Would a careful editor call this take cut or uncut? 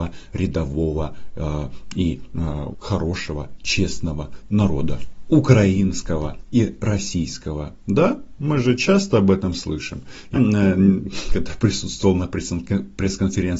cut